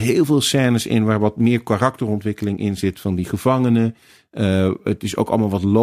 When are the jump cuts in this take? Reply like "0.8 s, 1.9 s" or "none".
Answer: none